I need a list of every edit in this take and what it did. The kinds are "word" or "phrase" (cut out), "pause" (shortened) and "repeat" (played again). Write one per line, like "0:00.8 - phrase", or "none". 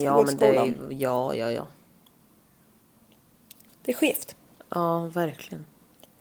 none